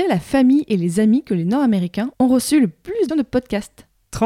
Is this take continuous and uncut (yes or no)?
no